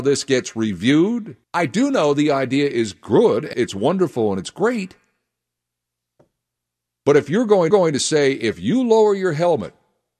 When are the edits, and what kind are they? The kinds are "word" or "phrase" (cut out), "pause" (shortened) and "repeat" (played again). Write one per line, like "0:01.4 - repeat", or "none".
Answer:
0:01.4 - pause
0:03.5 - phrase
0:07.7 - repeat